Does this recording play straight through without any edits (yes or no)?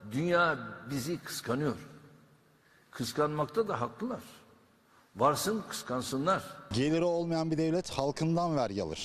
yes